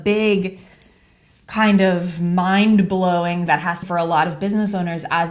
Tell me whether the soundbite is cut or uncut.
cut